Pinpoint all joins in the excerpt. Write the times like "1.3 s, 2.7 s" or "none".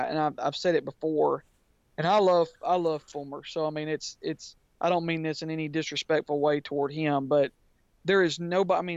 none